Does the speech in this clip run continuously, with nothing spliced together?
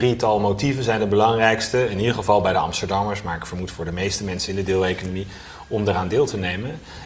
yes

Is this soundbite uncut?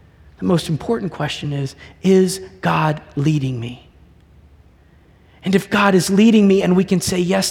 yes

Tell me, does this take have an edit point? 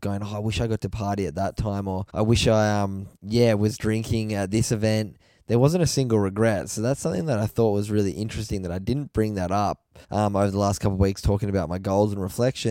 yes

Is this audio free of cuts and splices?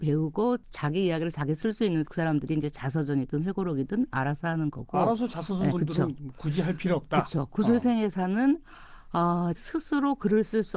no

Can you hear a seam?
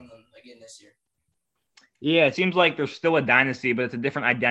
yes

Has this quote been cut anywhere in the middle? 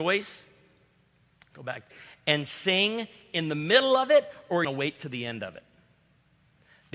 yes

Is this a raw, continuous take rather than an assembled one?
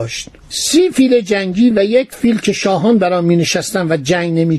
yes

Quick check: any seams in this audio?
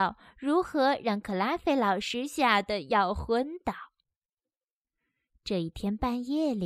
no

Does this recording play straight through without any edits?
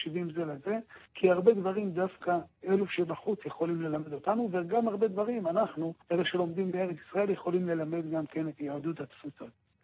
no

